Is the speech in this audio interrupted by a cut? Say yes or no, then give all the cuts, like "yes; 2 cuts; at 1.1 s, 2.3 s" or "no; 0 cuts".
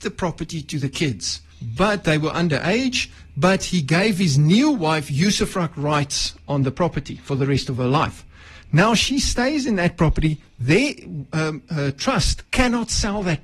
yes; 1 cut; at 1.5 s